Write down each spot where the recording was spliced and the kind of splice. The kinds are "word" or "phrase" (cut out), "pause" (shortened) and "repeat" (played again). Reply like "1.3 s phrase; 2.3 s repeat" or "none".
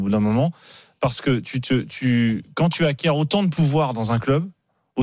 none